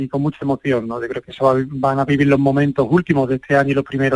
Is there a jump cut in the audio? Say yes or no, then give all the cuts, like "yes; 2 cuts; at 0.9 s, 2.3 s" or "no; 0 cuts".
no; 0 cuts